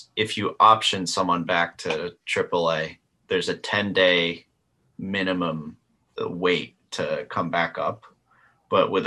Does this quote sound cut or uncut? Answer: uncut